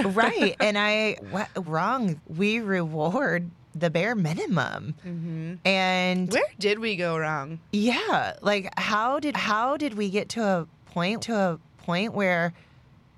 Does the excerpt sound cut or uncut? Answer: cut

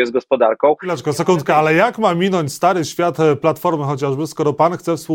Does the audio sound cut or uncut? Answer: uncut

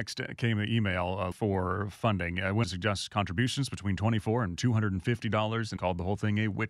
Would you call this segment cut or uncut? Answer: cut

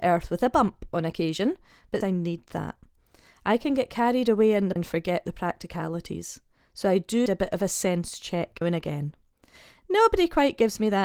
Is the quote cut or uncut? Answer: cut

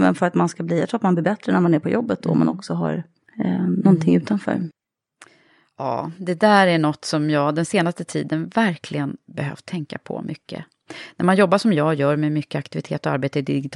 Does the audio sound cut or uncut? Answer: uncut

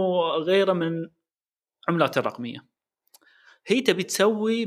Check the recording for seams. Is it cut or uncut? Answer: uncut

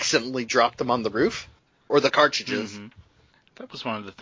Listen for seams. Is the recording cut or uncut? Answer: cut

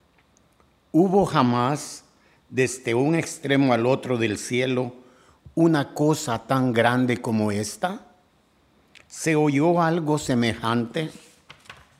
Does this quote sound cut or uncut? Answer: uncut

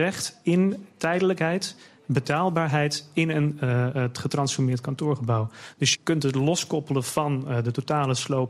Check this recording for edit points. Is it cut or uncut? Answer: cut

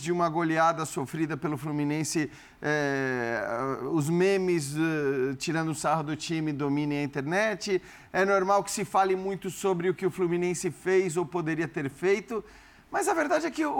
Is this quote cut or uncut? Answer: uncut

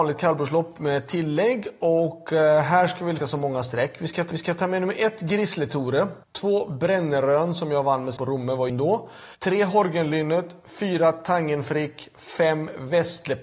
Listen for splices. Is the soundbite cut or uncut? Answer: cut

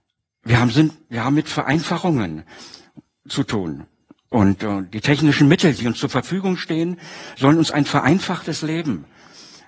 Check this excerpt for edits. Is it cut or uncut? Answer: uncut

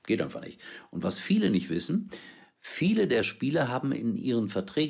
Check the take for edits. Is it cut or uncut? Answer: uncut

